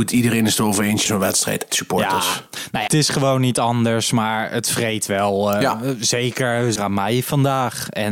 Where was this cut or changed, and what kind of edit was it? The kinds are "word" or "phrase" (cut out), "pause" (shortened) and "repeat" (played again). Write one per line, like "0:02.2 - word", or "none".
0:01.1 - phrase
0:01.7 - word
0:02.9 - phrase
0:06.8 - word